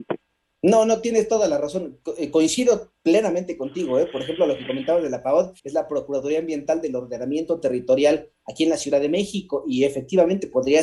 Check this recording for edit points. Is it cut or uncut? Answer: cut